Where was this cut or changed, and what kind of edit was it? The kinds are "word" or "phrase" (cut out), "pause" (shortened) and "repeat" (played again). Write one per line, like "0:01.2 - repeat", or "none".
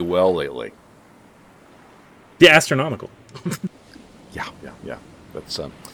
0:04.5 - word